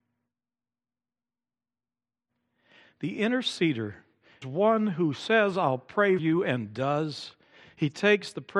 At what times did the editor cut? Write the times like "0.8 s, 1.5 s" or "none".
4.4 s, 6.2 s